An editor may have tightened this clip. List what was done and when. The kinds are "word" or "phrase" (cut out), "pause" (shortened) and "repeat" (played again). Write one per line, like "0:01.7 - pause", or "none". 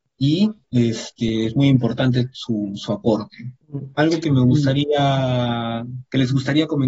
none